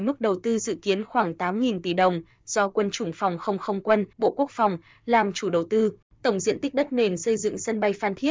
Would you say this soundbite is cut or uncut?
cut